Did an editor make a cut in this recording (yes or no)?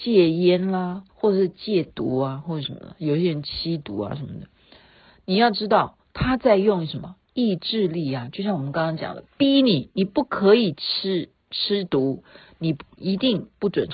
yes